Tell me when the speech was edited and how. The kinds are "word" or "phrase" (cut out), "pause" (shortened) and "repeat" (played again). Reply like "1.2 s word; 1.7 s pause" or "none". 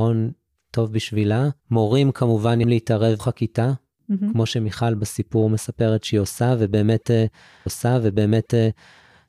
1.6 s pause; 2.6 s word; 3.2 s word; 7.7 s repeat

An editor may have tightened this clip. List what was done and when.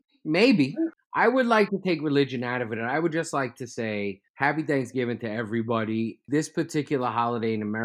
4.3 s pause

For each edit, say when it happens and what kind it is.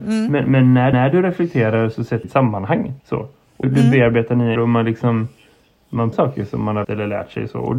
0.9 s repeat; 2.2 s phrase; 3.0 s pause; 3.6 s word; 4.6 s word; 6.1 s word; 6.8 s word

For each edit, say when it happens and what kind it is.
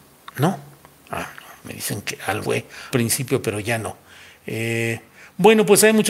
2.4 s word; 2.9 s word

